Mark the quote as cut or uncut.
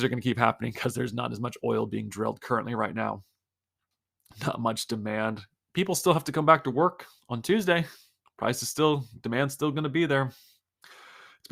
uncut